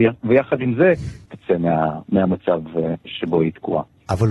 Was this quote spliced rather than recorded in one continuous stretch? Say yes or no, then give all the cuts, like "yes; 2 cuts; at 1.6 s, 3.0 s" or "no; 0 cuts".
yes; 1 cut; at 1.3 s